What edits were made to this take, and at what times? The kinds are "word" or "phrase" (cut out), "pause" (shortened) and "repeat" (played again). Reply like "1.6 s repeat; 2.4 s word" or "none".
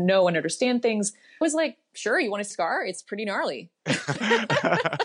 1.4 s word; 2.5 s word; 4.2 s word